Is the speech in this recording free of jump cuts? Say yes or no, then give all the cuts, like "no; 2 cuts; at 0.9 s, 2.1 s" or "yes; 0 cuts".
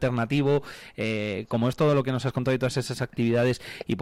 yes; 0 cuts